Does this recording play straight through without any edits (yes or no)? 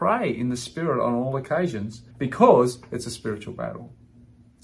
no